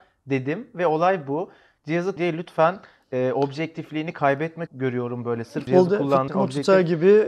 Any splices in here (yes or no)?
yes